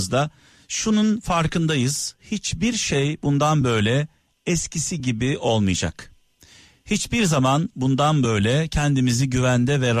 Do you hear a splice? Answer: no; 0 cuts

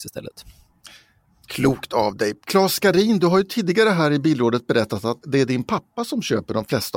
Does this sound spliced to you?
yes; 1 cut; at 5.2 s

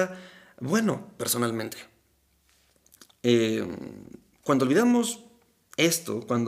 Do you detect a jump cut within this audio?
no; 0 cuts

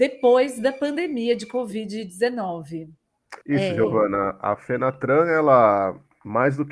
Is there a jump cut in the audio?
yes; 1 cut; at 3.4 s

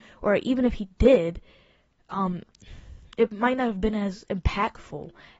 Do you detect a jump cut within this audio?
no; 0 cuts

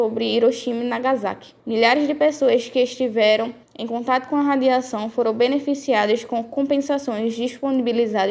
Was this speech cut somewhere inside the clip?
yes; 2 cuts; at 1.6 s, 3.6 s

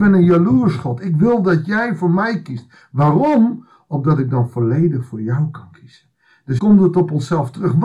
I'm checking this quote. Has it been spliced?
yes; 1 cut; at 6.6 s

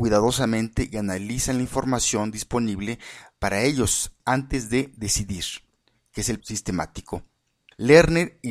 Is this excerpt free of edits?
no; 1 cut; at 6.4 s

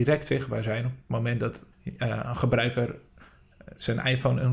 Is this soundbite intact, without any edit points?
no; 1 cut; at 1.7 s

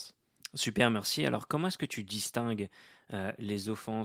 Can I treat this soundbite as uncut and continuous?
yes; 0 cuts

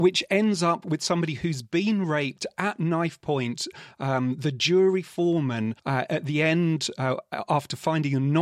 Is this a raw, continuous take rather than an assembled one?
no; 1 cut; at 5.8 s

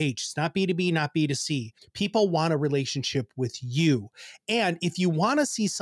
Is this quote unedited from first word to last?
no; 1 cut; at 1.8 s

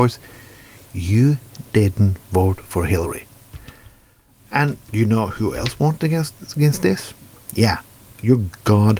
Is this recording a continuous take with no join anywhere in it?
yes; 0 cuts

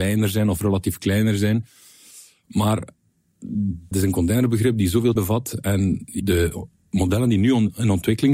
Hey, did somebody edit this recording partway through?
yes; 3 cuts; at 3.9 s, 5.2 s, 6.2 s

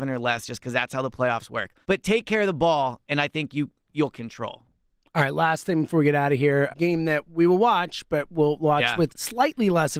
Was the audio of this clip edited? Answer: yes; 4 cuts; at 1.8 s, 4.1 s, 6.7 s, 9.1 s

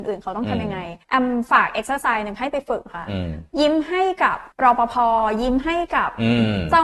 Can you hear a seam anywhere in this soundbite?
yes; 2 cuts; at 1.0 s, 4.5 s

